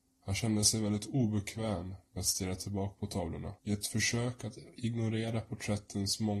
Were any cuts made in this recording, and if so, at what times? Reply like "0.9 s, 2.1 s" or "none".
3.6 s